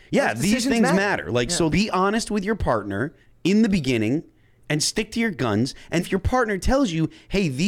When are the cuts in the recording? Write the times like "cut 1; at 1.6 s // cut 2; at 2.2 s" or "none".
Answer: cut 1; at 1.7 s // cut 2; at 3.2 s // cut 3; at 6.0 s